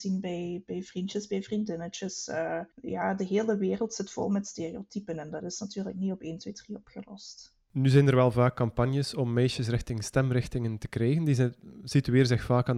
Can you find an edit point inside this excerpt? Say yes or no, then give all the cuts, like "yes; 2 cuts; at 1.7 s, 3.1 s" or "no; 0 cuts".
yes; 1 cut; at 2.7 s